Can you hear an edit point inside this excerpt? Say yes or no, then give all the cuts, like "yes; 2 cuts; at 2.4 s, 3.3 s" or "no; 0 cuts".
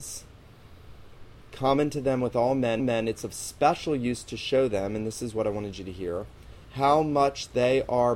yes; 2 cuts; at 2.8 s, 6.6 s